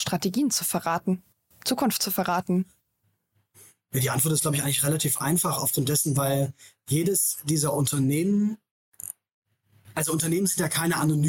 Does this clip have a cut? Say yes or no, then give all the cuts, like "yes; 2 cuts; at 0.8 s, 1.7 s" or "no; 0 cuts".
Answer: no; 0 cuts